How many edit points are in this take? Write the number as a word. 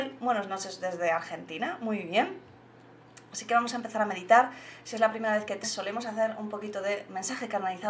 one